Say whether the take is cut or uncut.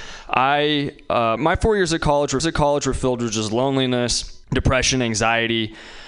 cut